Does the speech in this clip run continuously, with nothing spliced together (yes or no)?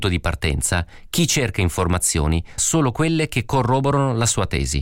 no